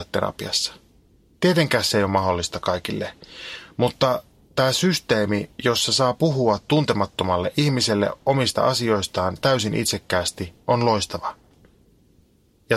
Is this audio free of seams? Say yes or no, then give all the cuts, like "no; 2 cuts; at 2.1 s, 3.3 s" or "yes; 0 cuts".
yes; 0 cuts